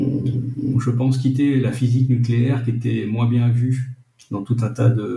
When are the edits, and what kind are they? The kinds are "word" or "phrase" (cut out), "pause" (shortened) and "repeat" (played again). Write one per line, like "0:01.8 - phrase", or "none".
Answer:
none